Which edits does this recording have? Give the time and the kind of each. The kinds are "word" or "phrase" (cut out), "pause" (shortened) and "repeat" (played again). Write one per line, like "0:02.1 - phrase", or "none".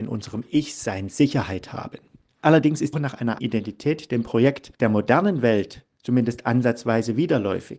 0:02.3 - pause
0:02.9 - word
0:03.4 - word
0:04.7 - pause